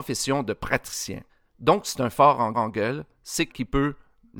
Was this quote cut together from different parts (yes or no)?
yes